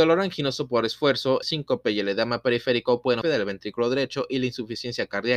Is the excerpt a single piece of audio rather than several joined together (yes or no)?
no